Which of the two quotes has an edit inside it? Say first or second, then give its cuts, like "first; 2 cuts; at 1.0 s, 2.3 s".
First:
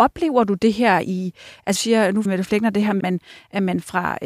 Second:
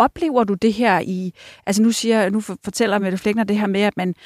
first; 3 cuts; at 1.8 s, 2.3 s, 3.0 s